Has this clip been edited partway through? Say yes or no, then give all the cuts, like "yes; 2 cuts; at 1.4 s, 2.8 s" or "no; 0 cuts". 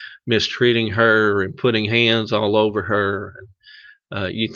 no; 0 cuts